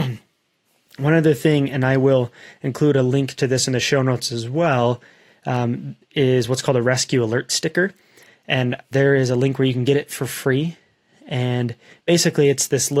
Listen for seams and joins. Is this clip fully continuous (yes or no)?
no